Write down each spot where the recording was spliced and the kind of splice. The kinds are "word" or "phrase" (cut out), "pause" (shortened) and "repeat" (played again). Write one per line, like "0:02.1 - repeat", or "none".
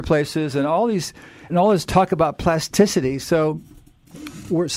0:01.5 - word